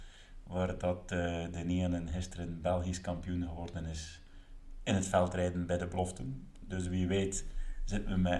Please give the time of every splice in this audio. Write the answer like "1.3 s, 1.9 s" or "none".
none

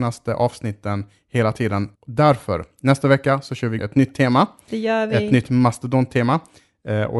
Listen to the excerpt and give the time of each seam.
1.9 s, 3.8 s

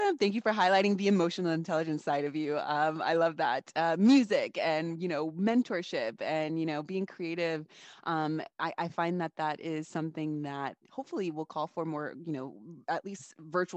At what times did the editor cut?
none

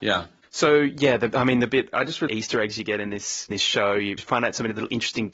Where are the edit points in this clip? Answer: 1.9 s, 2.3 s, 3.5 s, 4.2 s

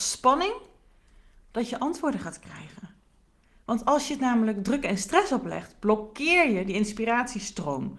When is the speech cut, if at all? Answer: none

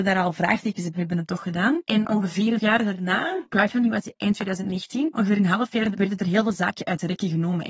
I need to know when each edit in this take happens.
0.9 s, 2.6 s, 3.5 s, 5.9 s

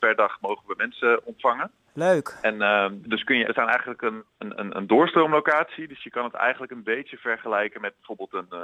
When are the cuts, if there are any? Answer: 3.0 s, 3.4 s, 4.3 s

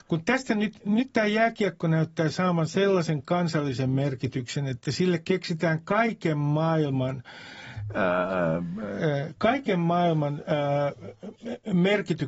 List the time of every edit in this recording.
none

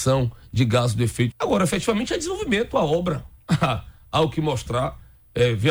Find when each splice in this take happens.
1.3 s

